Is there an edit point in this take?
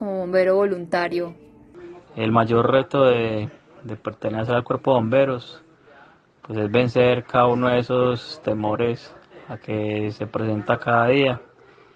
no; 0 cuts

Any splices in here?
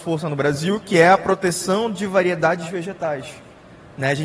no; 0 cuts

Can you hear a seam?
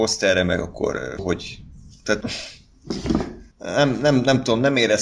yes; 3 cuts; at 1.2 s, 2.2 s, 3.5 s

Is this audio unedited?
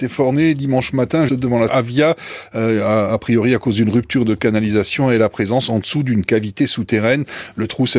no; 2 cuts; at 1.3 s, 1.7 s

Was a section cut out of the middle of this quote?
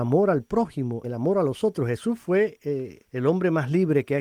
yes; 2 cuts; at 1.0 s, 3.0 s

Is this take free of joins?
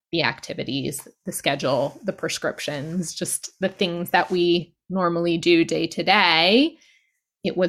yes; 0 cuts

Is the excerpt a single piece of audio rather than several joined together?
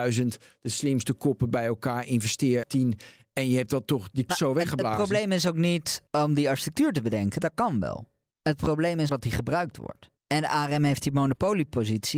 no; 6 cuts; at 2.6 s, 4.3 s, 6.1 s, 8.3 s, 9.1 s, 10.2 s

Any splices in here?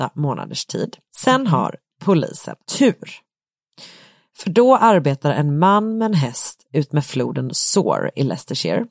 yes; 2 cuts; at 1.1 s, 2.6 s

